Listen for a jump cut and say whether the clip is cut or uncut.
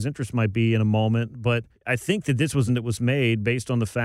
cut